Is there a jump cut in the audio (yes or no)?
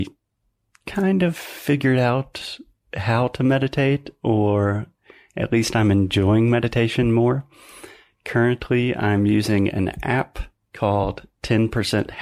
no